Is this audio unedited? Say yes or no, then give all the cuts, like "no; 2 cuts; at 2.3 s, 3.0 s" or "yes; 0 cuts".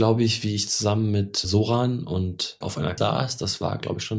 no; 3 cuts; at 1.4 s, 2.6 s, 3.0 s